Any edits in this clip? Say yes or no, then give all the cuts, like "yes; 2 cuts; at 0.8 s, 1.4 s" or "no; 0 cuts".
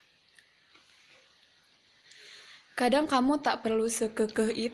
no; 0 cuts